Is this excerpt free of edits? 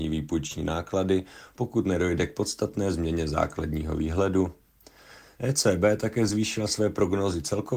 yes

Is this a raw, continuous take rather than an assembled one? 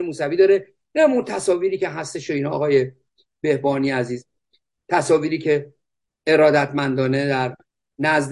yes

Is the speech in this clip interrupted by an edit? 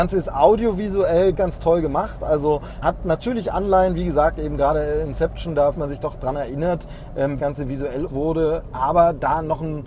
yes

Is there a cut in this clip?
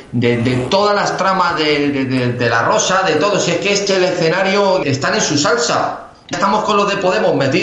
yes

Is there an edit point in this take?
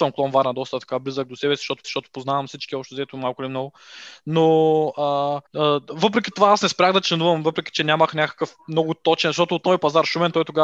yes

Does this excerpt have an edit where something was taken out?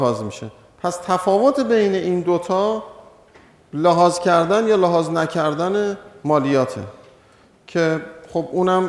no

